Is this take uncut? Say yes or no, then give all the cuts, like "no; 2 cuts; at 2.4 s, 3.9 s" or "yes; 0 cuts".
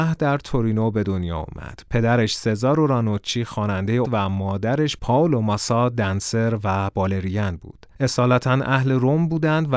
no; 1 cut; at 4.0 s